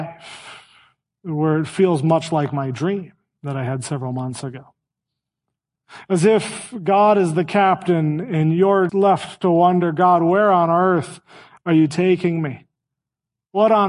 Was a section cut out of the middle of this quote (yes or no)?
yes